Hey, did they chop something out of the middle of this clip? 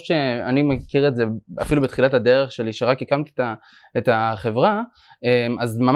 no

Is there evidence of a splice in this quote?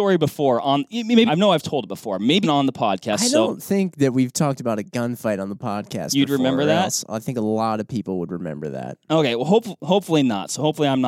yes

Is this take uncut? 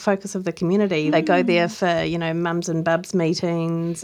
yes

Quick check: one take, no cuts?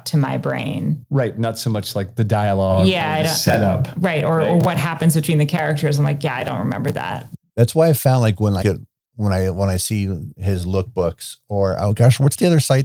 no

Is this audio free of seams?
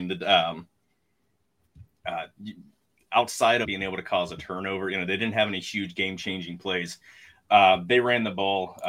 no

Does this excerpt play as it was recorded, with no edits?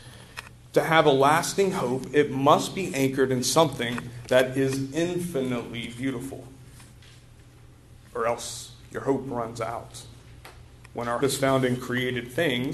no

